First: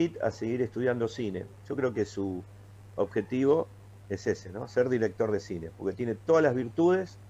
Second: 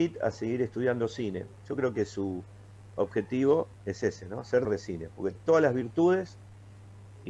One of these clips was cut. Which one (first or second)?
second